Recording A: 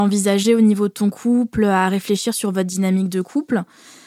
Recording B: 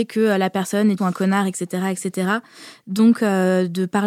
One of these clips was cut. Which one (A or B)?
B